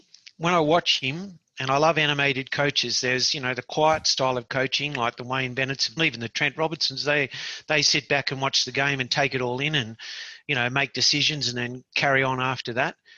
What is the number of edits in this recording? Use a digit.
1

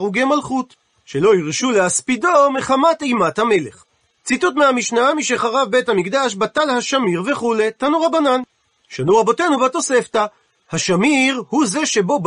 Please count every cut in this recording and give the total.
0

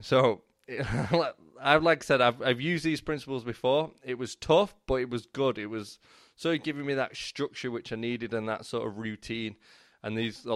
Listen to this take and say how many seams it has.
0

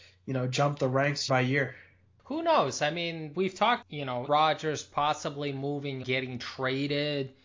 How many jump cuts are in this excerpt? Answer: 5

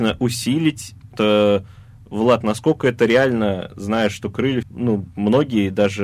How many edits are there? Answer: 2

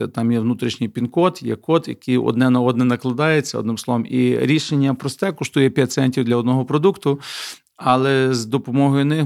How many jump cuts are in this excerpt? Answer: 0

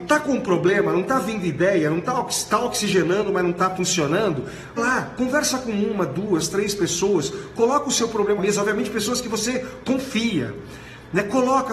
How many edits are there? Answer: 2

